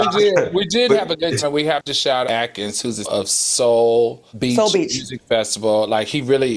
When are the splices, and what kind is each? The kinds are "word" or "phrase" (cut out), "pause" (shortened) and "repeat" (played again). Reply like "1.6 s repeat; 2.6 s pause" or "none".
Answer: 1.4 s word; 2.2 s phrase; 3.0 s word; 4.3 s pause